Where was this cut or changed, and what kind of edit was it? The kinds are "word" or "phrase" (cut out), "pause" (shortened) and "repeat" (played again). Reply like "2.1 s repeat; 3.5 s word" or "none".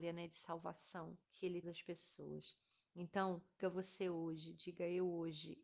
1.2 s pause; 1.6 s phrase; 3.6 s word